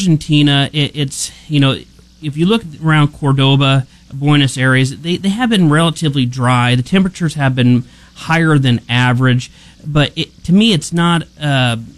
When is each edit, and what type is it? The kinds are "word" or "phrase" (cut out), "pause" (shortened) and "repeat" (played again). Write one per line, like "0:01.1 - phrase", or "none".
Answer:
none